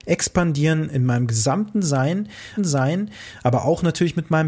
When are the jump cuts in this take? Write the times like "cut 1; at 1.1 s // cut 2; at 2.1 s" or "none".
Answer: cut 1; at 2.6 s